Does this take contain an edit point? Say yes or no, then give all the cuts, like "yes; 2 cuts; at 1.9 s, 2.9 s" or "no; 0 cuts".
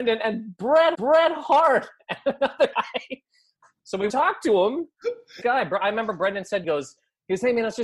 yes; 5 cuts; at 0.9 s, 2.7 s, 4.1 s, 5.4 s, 6.6 s